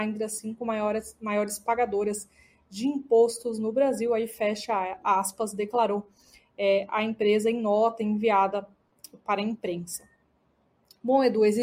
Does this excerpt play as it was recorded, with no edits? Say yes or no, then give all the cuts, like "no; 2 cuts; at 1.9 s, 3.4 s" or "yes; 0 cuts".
yes; 0 cuts